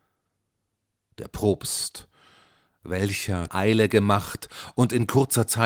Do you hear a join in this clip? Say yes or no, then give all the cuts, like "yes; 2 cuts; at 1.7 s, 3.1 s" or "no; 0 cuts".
yes; 1 cut; at 3.5 s